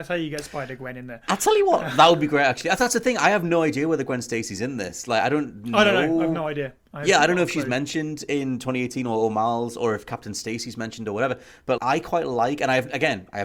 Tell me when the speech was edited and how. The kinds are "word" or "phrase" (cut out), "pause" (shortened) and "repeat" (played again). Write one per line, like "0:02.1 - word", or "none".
0:11.8 - word